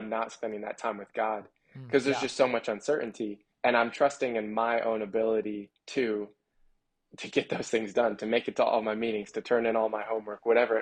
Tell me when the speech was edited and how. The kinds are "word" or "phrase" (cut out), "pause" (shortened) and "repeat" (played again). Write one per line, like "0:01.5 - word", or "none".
0:03.5 - pause
0:05.8 - pause